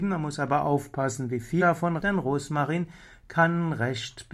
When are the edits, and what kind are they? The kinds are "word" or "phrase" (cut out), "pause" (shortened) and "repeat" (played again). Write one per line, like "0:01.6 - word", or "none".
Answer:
0:01.6 - word
0:02.0 - word